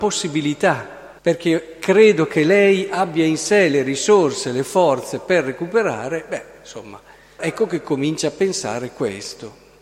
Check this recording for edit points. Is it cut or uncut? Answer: cut